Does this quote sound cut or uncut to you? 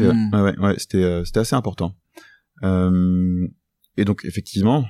uncut